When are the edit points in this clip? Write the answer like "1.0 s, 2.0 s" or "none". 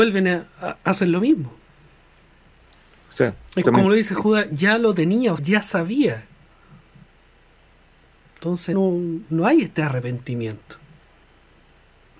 3.6 s, 5.4 s, 8.7 s